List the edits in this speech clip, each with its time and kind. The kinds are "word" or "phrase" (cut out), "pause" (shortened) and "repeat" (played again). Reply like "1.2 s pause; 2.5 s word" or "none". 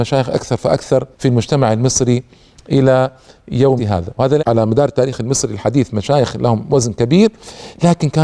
1.1 s pause; 3.8 s word; 4.4 s phrase